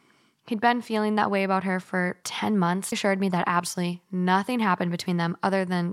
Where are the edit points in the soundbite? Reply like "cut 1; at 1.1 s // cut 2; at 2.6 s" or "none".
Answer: cut 1; at 2.2 s // cut 2; at 2.9 s

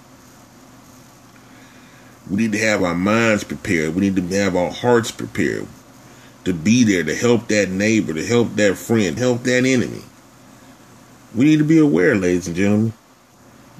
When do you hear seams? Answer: cut 1; at 9.2 s

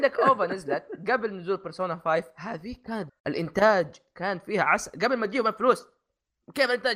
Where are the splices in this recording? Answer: cut 1; at 3.1 s

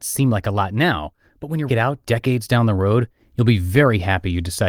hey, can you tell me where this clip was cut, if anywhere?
cut 1; at 1.7 s

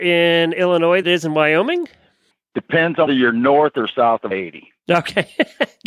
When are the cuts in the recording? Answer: cut 1; at 1.0 s // cut 2; at 2.3 s // cut 3; at 3.1 s // cut 4; at 4.3 s

